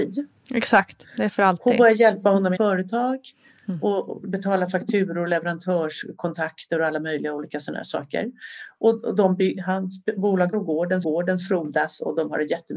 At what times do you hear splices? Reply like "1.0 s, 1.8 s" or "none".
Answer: 2.6 s, 10.5 s, 11.0 s